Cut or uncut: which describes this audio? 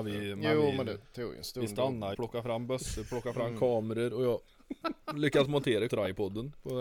cut